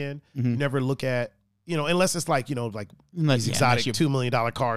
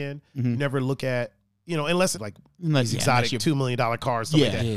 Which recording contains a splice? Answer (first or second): second